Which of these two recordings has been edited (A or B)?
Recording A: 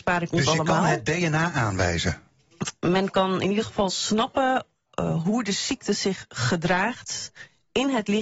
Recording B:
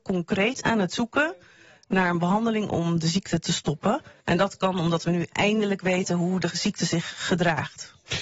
B